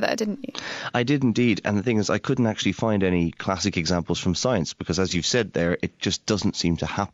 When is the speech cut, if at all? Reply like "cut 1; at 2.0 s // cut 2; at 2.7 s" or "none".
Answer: none